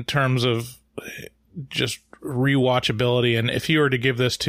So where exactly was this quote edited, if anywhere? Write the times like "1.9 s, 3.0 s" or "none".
none